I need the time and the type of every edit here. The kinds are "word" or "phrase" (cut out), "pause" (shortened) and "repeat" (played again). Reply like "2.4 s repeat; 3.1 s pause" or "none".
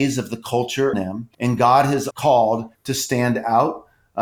0.9 s word; 1.3 s pause; 2.1 s word; 2.7 s phrase